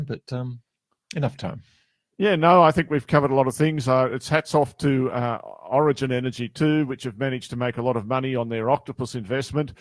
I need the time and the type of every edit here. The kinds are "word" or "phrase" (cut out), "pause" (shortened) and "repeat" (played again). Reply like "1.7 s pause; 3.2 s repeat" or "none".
none